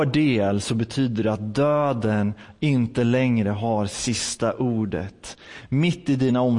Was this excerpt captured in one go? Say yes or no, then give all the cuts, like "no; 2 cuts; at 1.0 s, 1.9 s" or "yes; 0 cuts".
yes; 0 cuts